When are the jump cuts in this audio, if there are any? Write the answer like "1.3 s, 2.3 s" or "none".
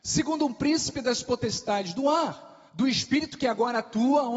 2.7 s